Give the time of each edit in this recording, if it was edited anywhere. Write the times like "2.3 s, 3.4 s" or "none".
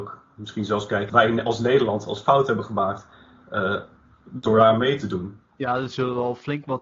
1.1 s